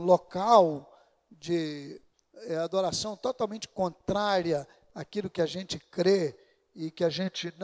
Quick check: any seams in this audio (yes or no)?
no